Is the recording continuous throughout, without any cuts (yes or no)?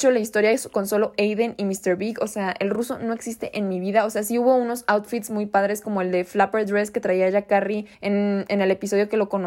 no